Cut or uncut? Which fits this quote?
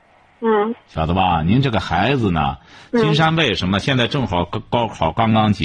uncut